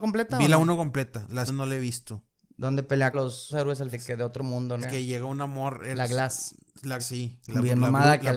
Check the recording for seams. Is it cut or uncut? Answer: cut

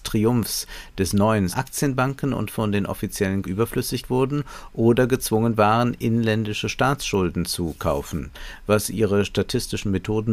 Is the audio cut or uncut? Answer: cut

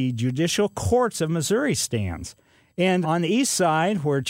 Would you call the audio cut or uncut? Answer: cut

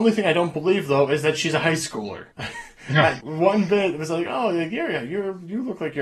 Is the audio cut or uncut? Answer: cut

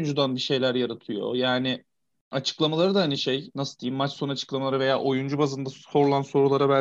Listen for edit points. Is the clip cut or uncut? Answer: uncut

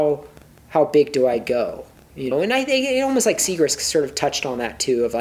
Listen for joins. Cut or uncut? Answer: cut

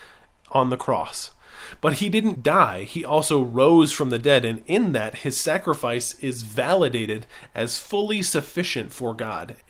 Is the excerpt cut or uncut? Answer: cut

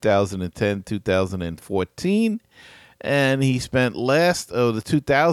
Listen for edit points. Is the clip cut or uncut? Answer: uncut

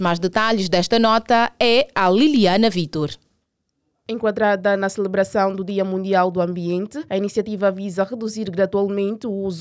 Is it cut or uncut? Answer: uncut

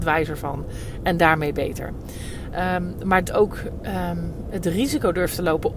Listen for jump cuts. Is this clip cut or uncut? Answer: cut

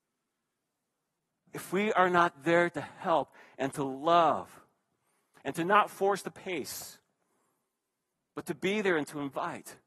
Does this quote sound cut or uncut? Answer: uncut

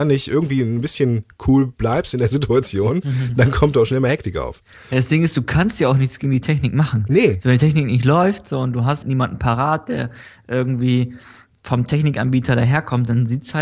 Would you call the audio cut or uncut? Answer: cut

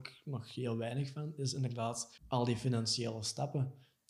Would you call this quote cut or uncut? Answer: cut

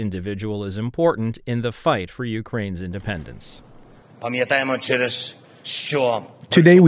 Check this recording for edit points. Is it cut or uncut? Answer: uncut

